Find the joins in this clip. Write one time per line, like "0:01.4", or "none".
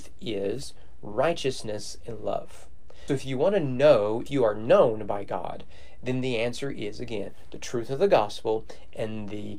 0:03.1
0:04.3